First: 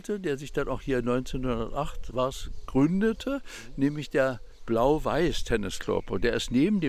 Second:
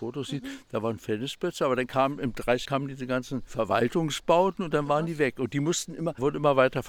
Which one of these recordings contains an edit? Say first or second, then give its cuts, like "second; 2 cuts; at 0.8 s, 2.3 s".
second; 1 cut; at 2.7 s